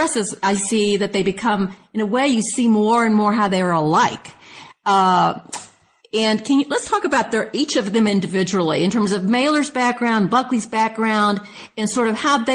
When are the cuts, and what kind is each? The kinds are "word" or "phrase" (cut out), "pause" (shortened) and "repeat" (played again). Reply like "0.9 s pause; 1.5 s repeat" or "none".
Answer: none